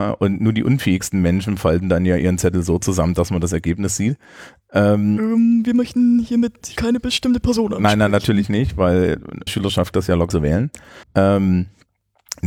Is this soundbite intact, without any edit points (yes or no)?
no